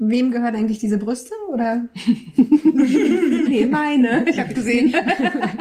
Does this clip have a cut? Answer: yes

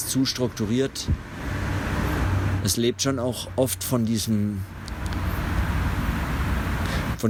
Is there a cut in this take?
no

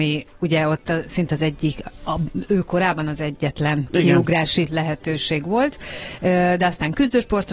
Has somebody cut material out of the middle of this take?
no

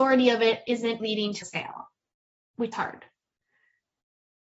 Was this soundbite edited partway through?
yes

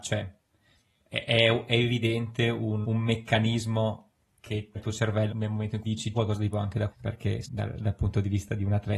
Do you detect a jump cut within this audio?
yes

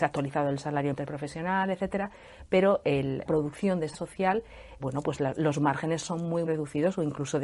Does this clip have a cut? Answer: yes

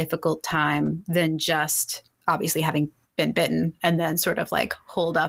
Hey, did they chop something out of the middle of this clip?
yes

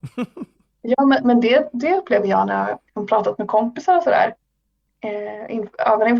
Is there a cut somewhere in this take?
yes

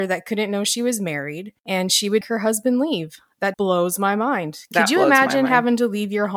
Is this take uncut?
no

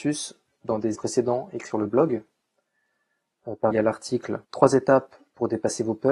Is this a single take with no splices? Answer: no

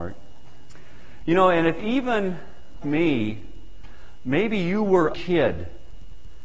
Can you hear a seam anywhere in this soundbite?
yes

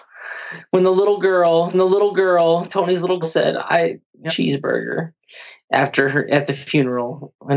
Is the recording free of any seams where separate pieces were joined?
no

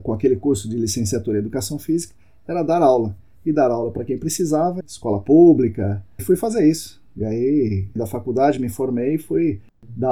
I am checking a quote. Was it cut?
yes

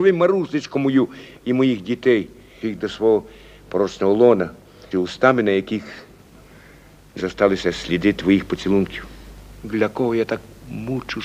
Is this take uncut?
no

